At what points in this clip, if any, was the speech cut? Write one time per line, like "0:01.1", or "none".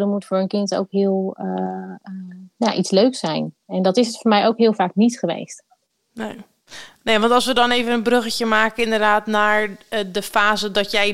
none